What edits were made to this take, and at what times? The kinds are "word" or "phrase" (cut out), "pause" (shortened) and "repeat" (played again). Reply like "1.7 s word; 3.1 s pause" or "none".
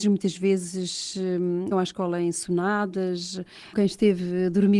1.7 s word; 3.7 s word